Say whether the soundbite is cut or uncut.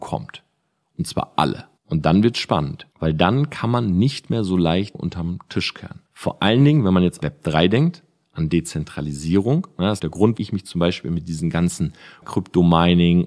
cut